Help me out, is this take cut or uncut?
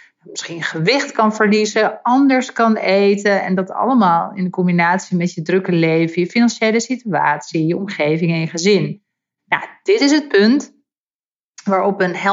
uncut